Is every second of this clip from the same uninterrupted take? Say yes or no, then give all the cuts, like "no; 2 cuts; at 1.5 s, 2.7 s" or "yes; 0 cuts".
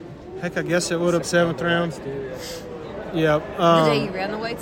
no; 1 cut; at 1.2 s